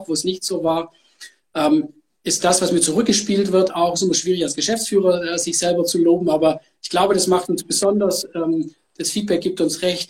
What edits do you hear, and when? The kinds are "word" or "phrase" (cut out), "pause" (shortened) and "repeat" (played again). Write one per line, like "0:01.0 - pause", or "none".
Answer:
none